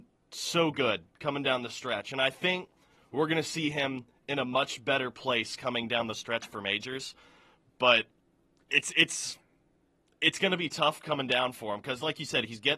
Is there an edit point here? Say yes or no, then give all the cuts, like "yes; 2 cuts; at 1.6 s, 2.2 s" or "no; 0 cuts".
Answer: no; 0 cuts